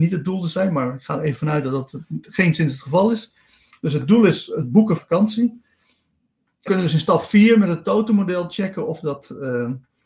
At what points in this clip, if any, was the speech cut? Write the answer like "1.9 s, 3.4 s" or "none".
5.0 s, 6.7 s